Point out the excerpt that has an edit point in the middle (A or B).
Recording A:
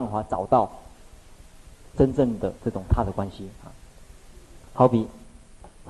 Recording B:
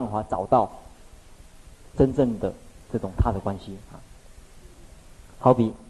A